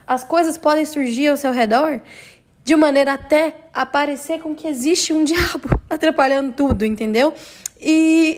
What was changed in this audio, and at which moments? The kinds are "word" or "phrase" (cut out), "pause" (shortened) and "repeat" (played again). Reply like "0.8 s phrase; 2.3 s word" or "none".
none